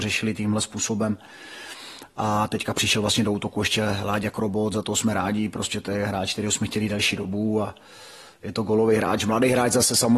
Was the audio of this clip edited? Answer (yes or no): no